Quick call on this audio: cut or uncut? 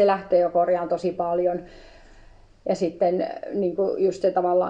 uncut